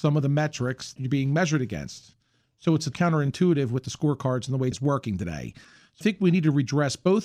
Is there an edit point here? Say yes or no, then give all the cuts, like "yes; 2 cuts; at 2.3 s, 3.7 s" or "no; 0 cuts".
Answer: yes; 4 cuts; at 1.0 s, 2.9 s, 4.7 s, 6.0 s